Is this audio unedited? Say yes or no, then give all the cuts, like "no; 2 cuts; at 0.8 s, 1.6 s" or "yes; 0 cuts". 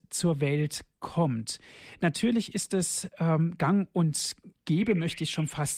yes; 0 cuts